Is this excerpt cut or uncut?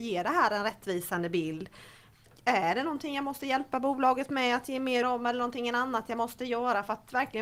cut